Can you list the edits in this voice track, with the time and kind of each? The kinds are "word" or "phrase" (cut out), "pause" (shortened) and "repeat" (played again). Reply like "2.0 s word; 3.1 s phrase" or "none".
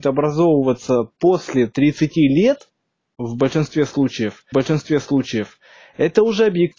4.5 s repeat